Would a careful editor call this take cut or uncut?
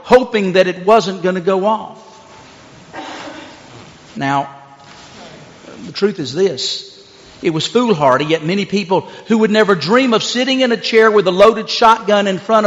uncut